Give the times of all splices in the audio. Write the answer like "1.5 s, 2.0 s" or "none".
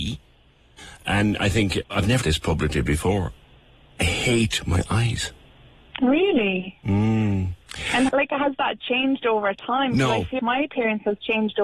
1.8 s, 2.2 s, 8.1 s, 10.4 s